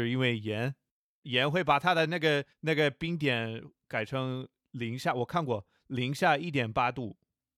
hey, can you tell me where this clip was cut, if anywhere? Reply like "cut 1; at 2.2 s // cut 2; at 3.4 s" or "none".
cut 1; at 2.5 s